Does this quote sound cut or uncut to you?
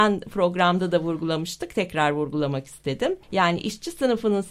cut